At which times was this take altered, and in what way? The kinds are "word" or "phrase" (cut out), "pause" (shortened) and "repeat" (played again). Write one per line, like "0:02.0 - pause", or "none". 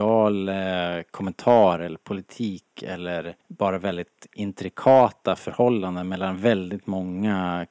0:03.4 - pause